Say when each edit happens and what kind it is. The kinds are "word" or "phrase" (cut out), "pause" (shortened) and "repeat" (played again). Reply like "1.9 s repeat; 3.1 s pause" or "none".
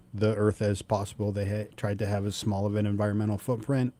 1.7 s pause

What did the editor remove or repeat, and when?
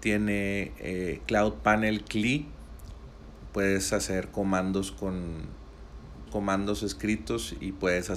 6.3 s word

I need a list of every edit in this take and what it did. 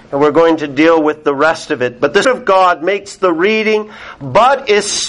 2.2 s word

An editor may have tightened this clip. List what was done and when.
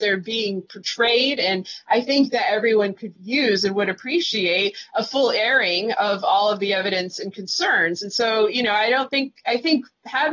3.1 s word

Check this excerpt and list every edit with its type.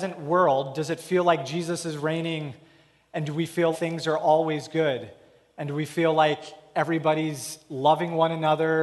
3.7 s word

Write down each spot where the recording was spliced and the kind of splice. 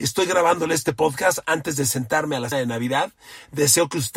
2.5 s word

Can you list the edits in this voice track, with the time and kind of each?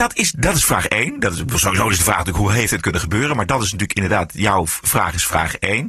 none

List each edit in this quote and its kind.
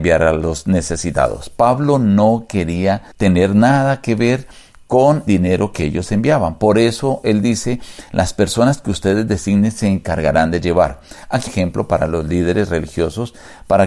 3.1 s pause; 5.3 s word; 11.5 s phrase

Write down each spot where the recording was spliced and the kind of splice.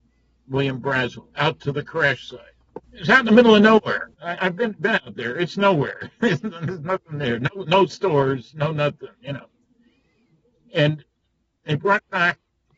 1.3 s pause; 2.8 s pause; 4.1 s pause

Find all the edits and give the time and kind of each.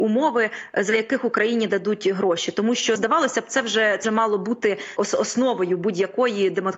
3.0 s word; 4.0 s word; 5.0 s word

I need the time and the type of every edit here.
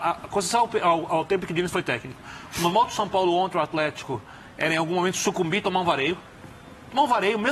3.5 s word

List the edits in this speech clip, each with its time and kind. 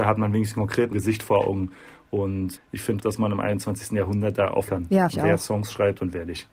0.9 s word; 2.6 s word; 3.0 s word; 4.7 s word; 5.1 s word

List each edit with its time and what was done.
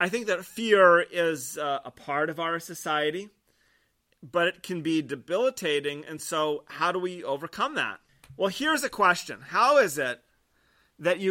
none

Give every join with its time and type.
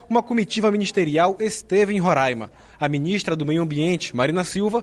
none

